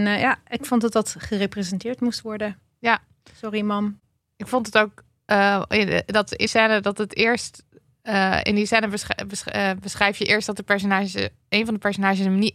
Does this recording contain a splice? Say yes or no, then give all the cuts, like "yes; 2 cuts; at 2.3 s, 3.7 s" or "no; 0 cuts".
yes; 1 cut; at 6.5 s